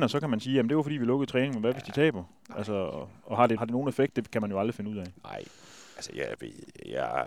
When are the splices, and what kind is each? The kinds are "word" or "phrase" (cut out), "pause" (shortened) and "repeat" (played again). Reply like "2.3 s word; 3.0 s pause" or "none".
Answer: 3.6 s word